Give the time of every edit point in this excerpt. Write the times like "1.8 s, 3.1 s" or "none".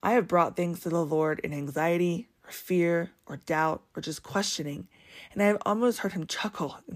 none